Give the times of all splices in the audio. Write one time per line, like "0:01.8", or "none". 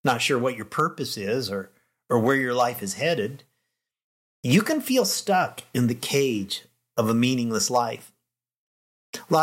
none